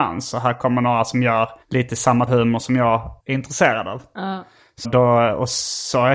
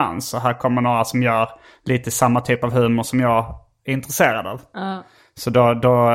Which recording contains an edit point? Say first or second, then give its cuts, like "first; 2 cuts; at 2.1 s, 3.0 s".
first; 4 cuts; at 1.6 s, 2.3 s, 3.2 s, 4.8 s